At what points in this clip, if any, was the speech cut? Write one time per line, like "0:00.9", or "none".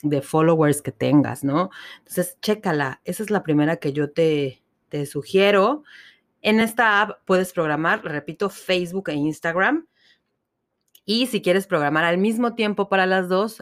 none